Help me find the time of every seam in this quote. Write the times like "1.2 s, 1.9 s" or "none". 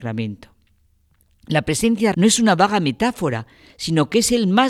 2.1 s